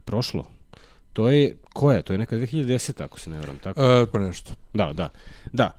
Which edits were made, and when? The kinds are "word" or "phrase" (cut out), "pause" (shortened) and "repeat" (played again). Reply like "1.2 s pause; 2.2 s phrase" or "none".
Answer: 4.1 s word